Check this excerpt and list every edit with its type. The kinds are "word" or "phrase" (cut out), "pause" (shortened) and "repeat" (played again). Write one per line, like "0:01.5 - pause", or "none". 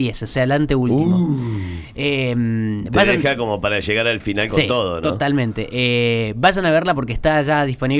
none

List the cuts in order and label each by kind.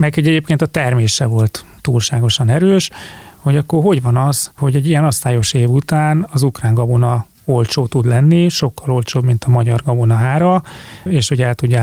0:07.4 - pause

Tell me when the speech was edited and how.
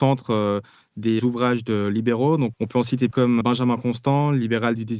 0:01.2 - word
0:02.5 - word
0:03.1 - word
0:03.4 - word

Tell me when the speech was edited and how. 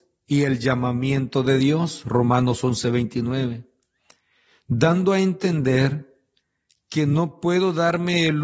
none

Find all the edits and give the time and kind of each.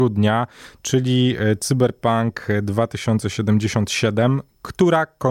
none

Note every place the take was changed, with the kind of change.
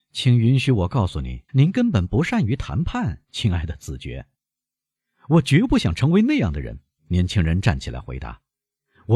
0:01.5 - pause
0:04.5 - pause
0:07.0 - pause

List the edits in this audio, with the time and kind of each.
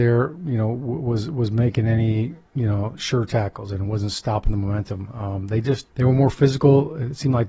0:02.5 - pause
0:05.9 - pause

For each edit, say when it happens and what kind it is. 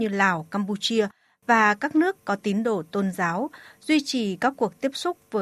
none

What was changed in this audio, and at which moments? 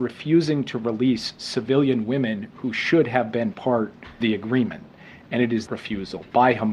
0:04.2 - word
0:05.7 - word

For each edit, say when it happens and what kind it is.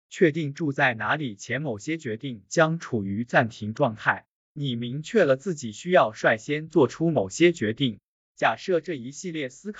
none

